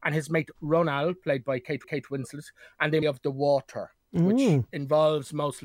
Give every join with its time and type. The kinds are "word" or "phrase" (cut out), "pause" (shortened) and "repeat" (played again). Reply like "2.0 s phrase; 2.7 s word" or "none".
1.8 s repeat; 3.0 s phrase

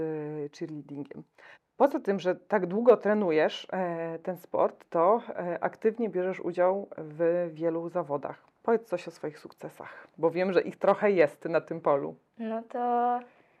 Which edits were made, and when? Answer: 1.5 s pause; 8.6 s pause; 10.1 s pause

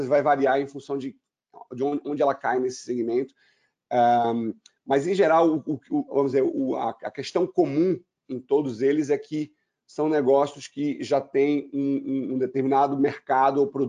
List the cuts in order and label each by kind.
none

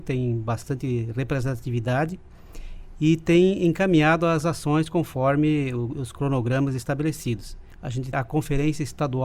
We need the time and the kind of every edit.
8.1 s word

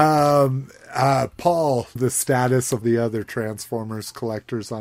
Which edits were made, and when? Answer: 2.0 s phrase; 2.8 s word

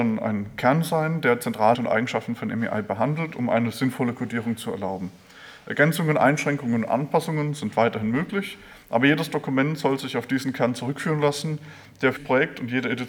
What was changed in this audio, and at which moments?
1.7 s word; 12.2 s word

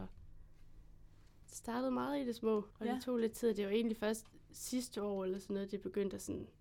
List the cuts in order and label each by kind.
2.7 s pause

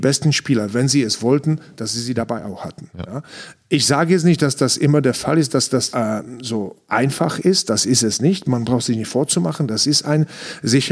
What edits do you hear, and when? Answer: 5.9 s word

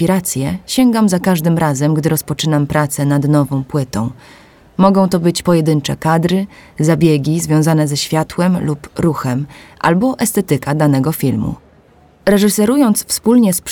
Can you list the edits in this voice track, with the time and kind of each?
none

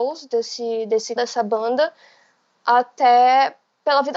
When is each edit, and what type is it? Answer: 1.2 s word

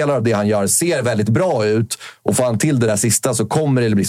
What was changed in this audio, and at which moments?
none

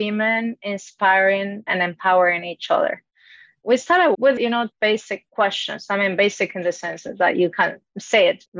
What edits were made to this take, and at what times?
1.7 s word; 4.1 s word; 4.7 s word

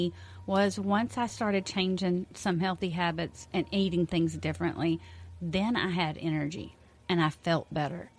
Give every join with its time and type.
none

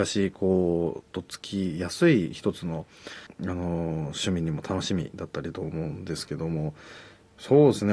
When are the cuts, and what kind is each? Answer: 3.3 s word

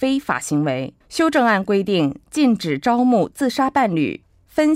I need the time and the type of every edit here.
1.0 s pause

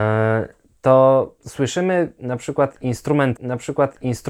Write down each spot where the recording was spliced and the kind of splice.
1.4 s pause; 3.3 s repeat

